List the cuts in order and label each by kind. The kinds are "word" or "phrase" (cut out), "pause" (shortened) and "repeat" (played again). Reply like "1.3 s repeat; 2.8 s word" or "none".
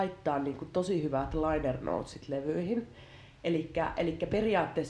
none